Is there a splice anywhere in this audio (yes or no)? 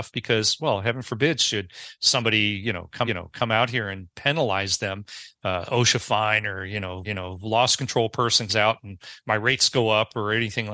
yes